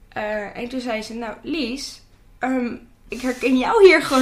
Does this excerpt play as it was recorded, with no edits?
yes; 0 cuts

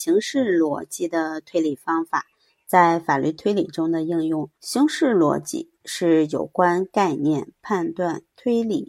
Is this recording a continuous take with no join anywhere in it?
no; 1 cut; at 4.5 s

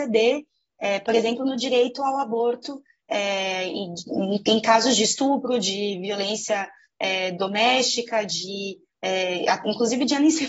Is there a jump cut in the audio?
no; 0 cuts

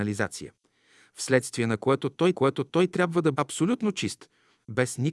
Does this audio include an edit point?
yes; 2 cuts; at 2.3 s, 3.3 s

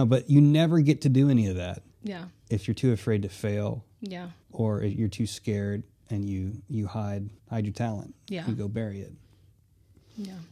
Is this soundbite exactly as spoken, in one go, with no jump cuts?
no; 3 cuts; at 1.9 s, 4.4 s, 7.4 s

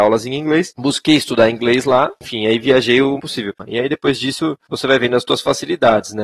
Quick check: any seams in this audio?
yes; 1 cut; at 3.2 s

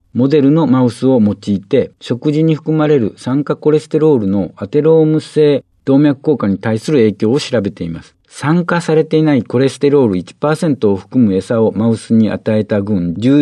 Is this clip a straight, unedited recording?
no; 2 cuts; at 2.0 s, 8.2 s

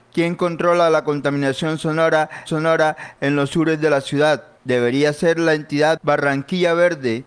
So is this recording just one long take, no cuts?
no; 1 cut; at 2.5 s

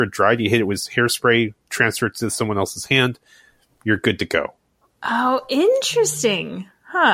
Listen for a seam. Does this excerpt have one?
no; 0 cuts

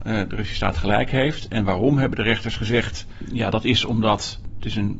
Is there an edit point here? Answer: no; 0 cuts

